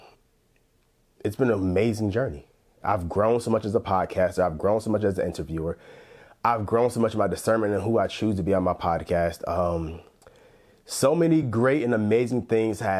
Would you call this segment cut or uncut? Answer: uncut